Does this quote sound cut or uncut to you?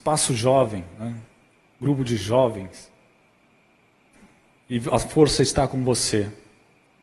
uncut